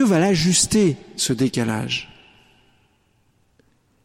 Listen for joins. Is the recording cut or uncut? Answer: uncut